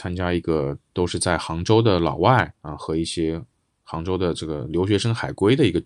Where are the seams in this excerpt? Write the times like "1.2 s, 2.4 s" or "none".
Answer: 2.6 s